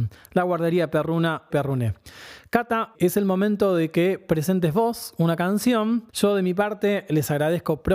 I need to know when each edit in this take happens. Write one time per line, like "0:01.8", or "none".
0:01.5
0:02.9
0:06.1